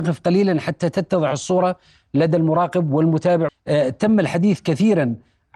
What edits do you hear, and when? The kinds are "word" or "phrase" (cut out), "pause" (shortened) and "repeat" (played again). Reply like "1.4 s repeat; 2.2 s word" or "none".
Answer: 3.5 s word

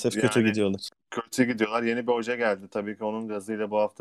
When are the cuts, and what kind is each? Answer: none

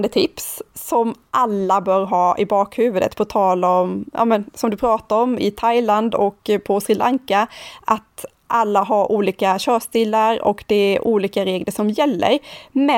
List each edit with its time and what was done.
none

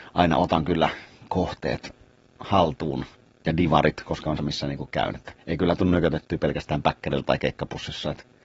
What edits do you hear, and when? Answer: 3.1 s pause; 4.4 s phrase; 5.4 s pause

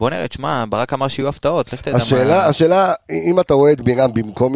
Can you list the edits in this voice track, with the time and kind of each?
none

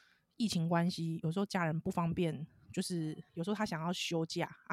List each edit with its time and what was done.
3.3 s pause

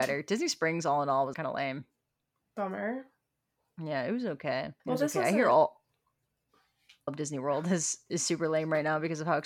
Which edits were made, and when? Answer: 1.3 s word; 4.8 s pause; 7.1 s phrase

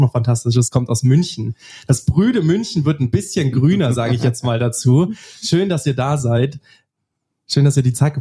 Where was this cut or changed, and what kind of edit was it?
none

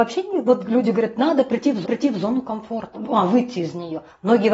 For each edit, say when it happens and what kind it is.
1.8 s repeat; 2.9 s word

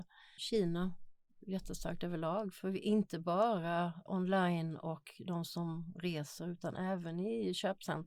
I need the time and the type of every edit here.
4.1 s word

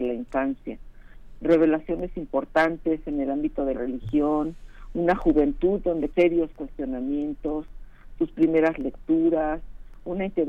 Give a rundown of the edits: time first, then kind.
1.4 s word; 3.7 s word; 6.1 s word

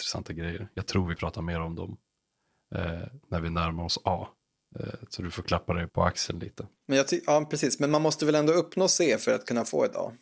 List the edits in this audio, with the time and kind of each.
1.2 s word; 3.2 s pause; 5.9 s word; 6.8 s pause

